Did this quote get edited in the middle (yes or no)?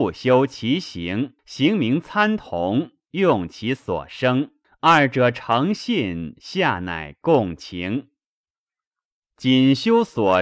yes